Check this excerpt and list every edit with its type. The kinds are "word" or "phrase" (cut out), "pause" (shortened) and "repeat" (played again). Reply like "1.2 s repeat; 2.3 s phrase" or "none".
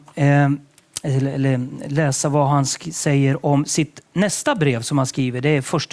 none